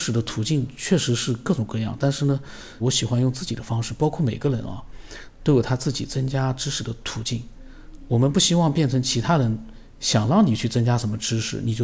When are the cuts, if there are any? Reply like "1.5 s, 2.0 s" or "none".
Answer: 2.8 s